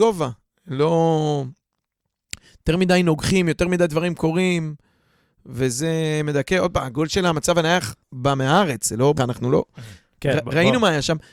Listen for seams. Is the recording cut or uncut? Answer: cut